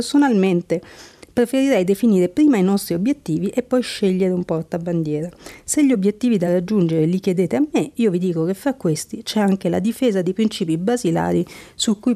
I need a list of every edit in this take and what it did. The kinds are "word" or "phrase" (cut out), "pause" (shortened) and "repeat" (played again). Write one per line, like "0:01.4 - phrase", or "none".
none